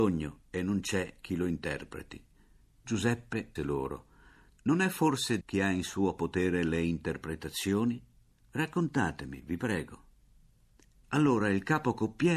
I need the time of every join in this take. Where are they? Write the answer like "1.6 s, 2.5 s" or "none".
3.6 s, 5.4 s